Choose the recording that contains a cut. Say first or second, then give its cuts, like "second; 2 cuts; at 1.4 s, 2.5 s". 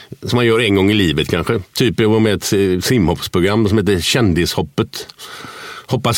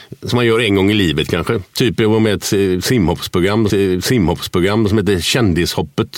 second; 1 cut; at 3.7 s